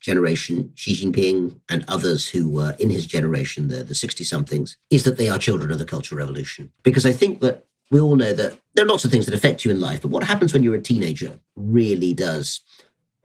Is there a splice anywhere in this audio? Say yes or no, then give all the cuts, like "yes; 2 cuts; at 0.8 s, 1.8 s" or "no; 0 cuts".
yes; 5 cuts; at 1.6 s, 4.8 s, 6.8 s, 8.7 s, 11.5 s